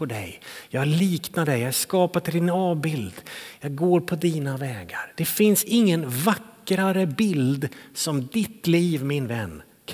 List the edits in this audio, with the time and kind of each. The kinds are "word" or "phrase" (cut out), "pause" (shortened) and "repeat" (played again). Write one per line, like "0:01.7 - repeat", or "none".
none